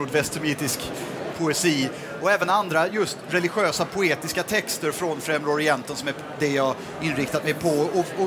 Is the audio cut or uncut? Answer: uncut